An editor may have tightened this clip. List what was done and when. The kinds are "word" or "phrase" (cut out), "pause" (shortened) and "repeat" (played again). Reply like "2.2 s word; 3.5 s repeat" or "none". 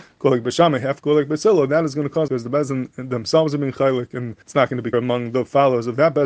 2.3 s word; 4.4 s pause; 4.9 s word

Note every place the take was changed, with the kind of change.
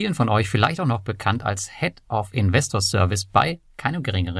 none

